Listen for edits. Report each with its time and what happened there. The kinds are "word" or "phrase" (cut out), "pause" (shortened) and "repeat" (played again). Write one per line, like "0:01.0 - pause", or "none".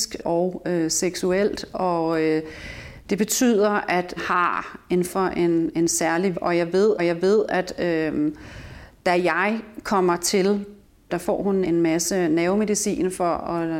0:04.2 - word
0:05.1 - word
0:06.3 - word
0:07.0 - repeat
0:09.0 - pause
0:10.8 - pause
0:11.6 - word